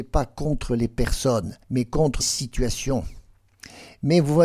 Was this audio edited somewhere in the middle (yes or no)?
yes